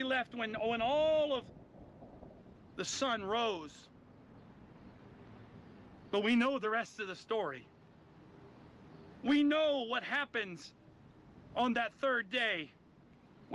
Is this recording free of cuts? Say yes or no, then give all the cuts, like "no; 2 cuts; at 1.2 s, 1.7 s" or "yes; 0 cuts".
yes; 0 cuts